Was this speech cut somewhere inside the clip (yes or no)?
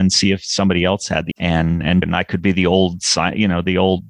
yes